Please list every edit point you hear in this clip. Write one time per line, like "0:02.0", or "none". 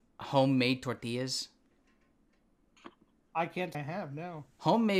0:03.7

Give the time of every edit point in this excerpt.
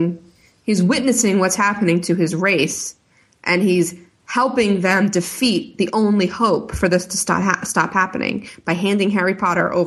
none

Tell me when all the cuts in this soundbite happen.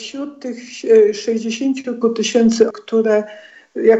0:02.0
0:02.7

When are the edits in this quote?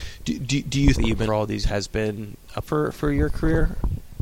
0:01.0
0:01.3
0:01.6
0:02.6

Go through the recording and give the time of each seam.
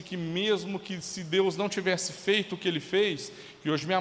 none

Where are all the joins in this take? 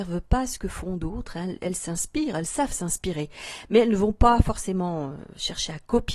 none

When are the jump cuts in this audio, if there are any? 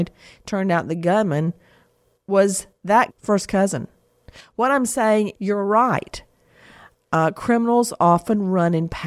0:03.1
0:05.3

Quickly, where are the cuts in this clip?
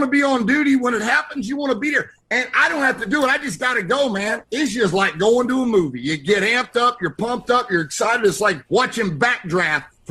0:02.2
0:08.7

